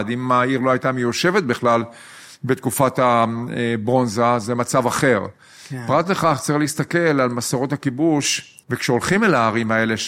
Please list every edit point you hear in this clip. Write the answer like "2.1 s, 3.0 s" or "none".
8.6 s